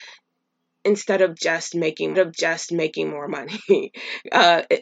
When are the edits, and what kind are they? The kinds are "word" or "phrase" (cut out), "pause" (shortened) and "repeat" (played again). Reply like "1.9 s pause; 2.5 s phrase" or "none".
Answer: 2.1 s repeat

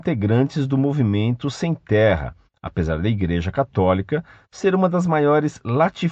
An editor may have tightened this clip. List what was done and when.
none

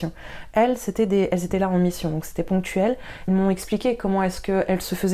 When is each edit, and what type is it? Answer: 3.3 s phrase

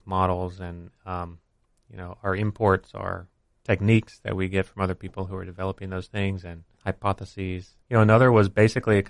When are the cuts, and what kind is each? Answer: 7.8 s pause

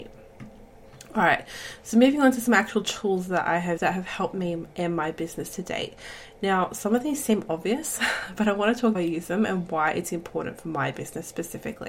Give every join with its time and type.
3.8 s word; 8.9 s phrase

